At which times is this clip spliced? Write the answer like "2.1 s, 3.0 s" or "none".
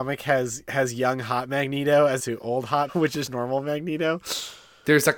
2.2 s, 2.9 s, 3.3 s